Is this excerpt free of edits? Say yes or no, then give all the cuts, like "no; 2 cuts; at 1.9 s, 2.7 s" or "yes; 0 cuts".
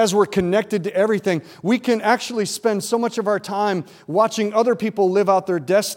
yes; 0 cuts